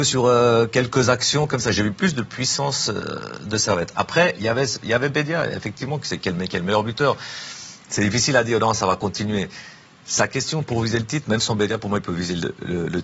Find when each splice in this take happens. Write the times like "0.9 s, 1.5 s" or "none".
11.2 s